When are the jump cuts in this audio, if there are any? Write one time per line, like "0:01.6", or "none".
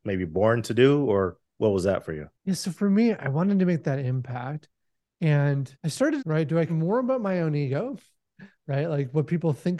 0:02.4
0:05.7
0:06.2
0:06.7